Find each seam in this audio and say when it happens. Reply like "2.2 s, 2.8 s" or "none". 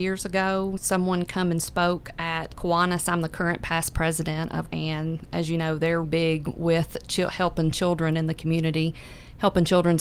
2.5 s, 4.7 s, 6.0 s